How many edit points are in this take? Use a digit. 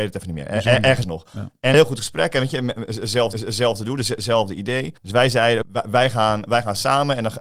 6